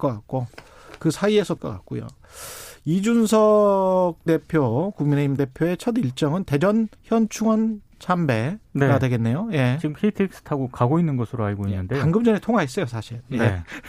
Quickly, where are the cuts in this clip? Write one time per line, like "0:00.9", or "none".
0:01.6
0:04.3
0:05.4
0:06.9
0:08.6